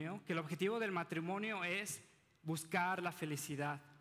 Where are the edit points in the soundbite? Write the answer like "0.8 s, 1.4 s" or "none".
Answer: none